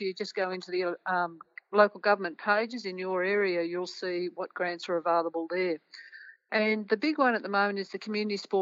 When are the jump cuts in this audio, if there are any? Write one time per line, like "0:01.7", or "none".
none